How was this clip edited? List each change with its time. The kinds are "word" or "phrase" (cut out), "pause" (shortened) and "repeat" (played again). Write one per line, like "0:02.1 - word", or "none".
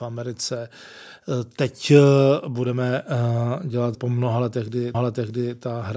0:03.9 - word
0:04.9 - repeat